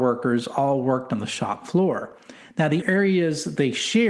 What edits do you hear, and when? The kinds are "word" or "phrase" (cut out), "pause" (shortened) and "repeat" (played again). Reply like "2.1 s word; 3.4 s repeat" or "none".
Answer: 2.8 s word